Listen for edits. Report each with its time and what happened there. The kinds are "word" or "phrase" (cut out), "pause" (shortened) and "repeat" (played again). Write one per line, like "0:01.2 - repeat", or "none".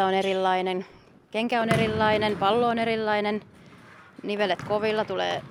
none